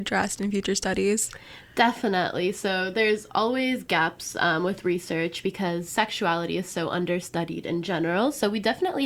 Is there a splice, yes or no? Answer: no